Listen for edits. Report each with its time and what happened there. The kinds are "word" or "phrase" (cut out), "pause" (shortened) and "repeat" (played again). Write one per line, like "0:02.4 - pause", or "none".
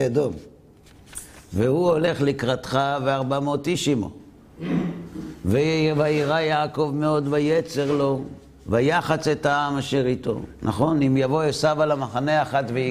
0:01.4 - pause